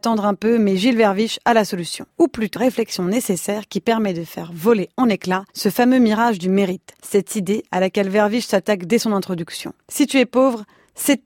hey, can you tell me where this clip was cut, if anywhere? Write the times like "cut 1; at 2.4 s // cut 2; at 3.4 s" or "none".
cut 1; at 2.1 s // cut 2; at 2.6 s // cut 3; at 5.5 s // cut 4; at 7.0 s // cut 5; at 9.8 s